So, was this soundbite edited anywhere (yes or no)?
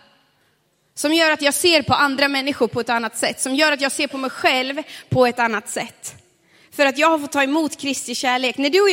no